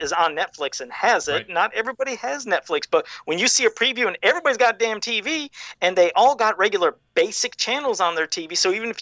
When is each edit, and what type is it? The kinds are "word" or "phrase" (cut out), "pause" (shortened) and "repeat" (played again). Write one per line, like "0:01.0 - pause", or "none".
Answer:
none